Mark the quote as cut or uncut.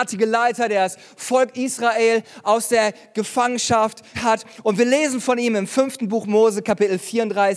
cut